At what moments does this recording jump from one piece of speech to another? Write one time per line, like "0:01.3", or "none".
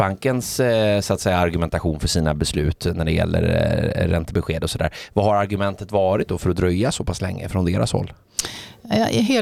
none